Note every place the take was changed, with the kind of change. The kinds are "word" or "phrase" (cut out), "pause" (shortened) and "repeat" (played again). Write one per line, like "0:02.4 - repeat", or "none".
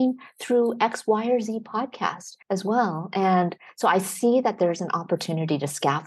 0:02.4 - pause

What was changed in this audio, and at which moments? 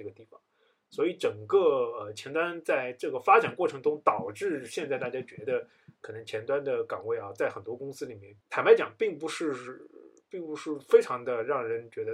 0:08.4 - pause

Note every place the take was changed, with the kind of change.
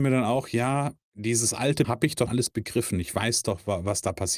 0:01.0 - pause
0:01.8 - word
0:02.3 - word

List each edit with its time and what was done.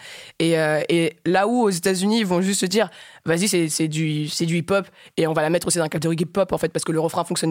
none

